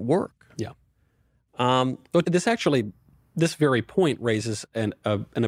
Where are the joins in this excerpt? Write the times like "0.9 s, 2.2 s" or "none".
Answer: 2.2 s